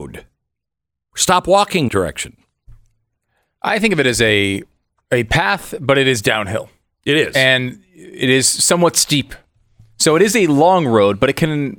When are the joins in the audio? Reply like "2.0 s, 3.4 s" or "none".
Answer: 1.9 s

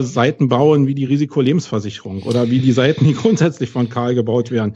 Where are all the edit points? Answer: none

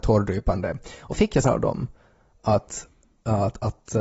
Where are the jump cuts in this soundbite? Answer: 1.1 s, 1.4 s

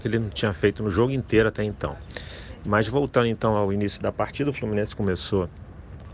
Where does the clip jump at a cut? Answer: none

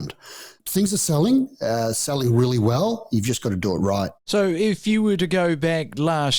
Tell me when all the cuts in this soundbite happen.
4.2 s

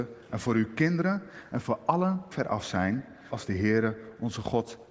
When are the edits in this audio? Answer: 2.3 s, 3.3 s

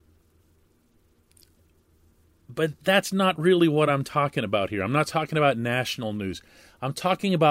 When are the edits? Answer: none

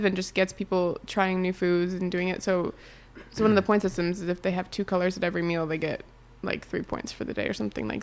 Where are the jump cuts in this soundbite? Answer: none

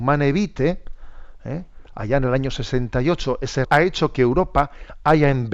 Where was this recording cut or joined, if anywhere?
3.6 s

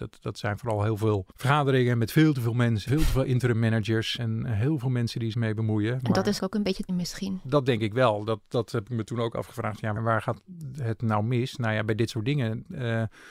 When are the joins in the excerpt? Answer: 1.3 s, 2.9 s, 4.2 s, 5.3 s, 6.4 s, 6.9 s, 10.0 s

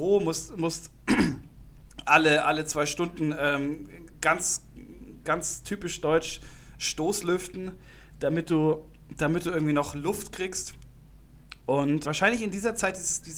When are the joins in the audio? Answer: 12.0 s

